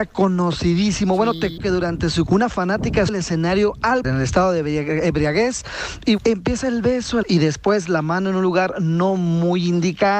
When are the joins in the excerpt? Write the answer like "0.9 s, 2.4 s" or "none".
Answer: 1.6 s, 2.3 s, 3.1 s, 4.0 s, 6.2 s, 7.2 s

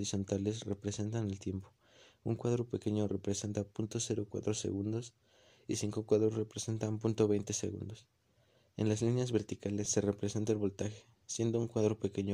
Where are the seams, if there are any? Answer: none

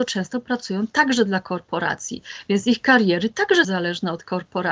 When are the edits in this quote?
3.6 s

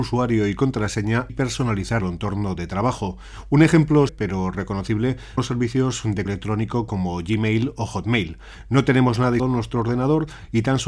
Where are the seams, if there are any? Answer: 1.3 s, 2.0 s, 4.1 s, 5.4 s, 6.3 s, 9.4 s

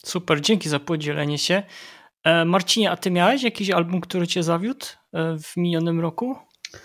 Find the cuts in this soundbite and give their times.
none

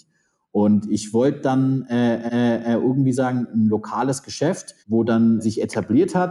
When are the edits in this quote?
2.3 s, 4.8 s, 5.4 s

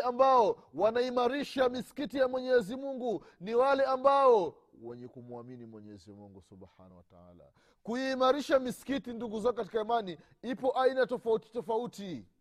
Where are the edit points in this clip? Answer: none

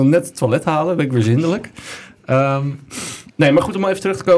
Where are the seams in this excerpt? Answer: 3.3 s

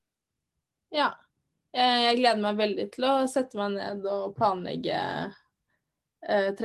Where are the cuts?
none

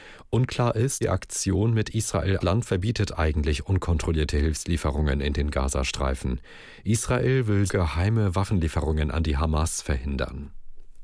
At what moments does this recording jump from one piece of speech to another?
1.0 s, 2.4 s, 7.7 s

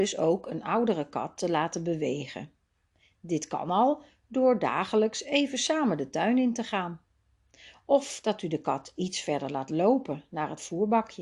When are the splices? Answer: none

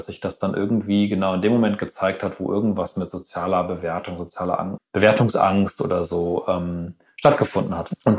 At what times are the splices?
4.8 s

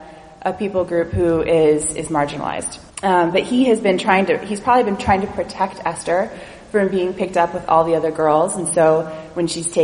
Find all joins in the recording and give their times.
2.9 s

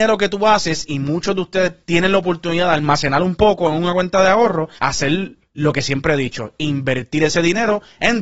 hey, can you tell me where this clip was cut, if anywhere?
1.8 s, 4.8 s

